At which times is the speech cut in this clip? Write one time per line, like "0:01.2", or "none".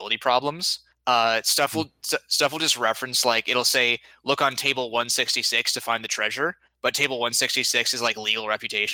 none

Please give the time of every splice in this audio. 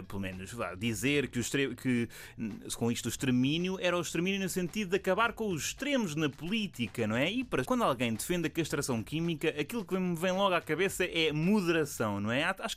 0:07.6

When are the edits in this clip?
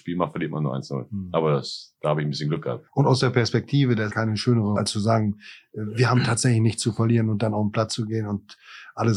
0:02.9
0:04.1
0:04.8

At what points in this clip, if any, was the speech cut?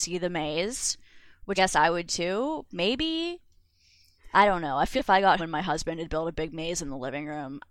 0:01.6
0:02.1
0:05.0
0:05.4

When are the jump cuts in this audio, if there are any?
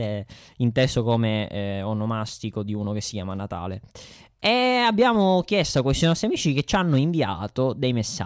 none

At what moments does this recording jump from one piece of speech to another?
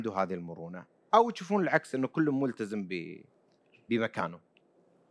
none

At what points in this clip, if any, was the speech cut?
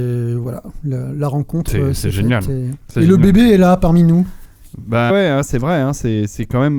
0:05.1

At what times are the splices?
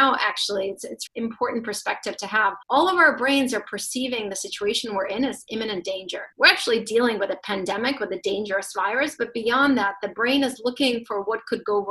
0:01.1
0:02.6
0:06.3

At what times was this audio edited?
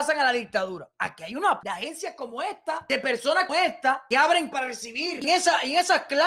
0:01.6
0:03.5
0:04.5
0:05.2

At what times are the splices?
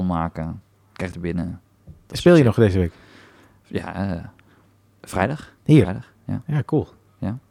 0:01.1
0:05.6

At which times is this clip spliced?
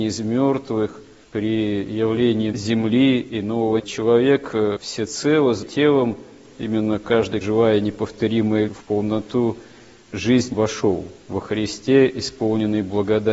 0:02.5
0:03.8
0:05.6
0:07.4
0:08.7
0:10.5

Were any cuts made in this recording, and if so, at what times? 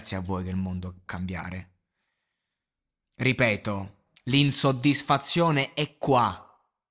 0:01.1
0:04.1

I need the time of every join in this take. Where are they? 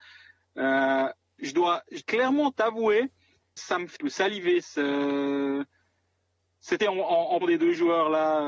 0:01.4
0:02.0
0:03.6
0:04.0
0:06.8
0:07.4

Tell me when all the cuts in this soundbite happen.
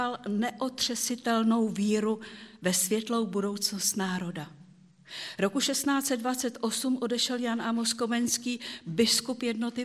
none

